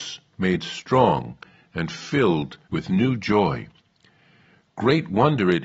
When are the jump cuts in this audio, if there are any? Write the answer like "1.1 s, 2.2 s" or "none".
2.6 s